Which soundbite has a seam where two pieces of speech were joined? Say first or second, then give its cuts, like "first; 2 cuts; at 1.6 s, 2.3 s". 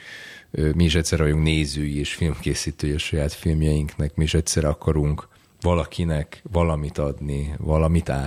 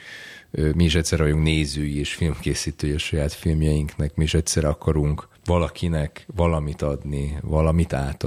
second; 1 cut; at 5.4 s